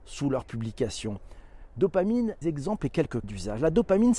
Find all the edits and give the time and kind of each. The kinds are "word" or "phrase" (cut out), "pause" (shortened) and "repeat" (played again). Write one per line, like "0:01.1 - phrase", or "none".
0:02.4 - word
0:03.2 - word